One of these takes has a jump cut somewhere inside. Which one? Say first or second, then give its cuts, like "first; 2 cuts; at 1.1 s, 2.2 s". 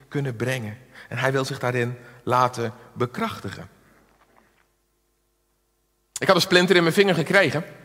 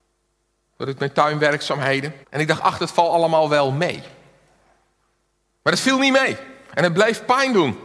second; 1 cut; at 2.2 s